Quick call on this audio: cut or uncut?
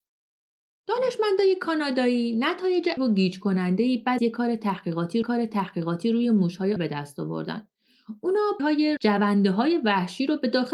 cut